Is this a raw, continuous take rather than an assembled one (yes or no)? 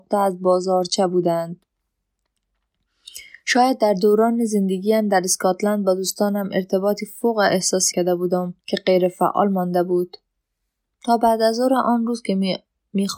no